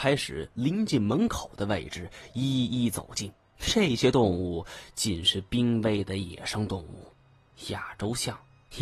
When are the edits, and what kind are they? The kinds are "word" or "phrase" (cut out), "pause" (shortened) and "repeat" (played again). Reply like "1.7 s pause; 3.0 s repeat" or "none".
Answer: 3.4 s pause